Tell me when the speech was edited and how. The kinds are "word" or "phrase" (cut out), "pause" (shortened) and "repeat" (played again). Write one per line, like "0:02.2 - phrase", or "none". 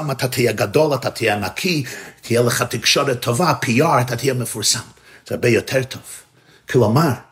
none